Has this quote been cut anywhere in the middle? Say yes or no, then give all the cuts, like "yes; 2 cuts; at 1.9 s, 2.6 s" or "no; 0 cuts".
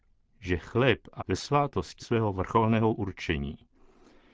yes; 2 cuts; at 1.2 s, 2.0 s